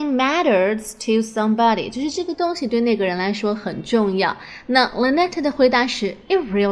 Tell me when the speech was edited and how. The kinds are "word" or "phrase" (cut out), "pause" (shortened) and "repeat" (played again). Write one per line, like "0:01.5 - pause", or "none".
none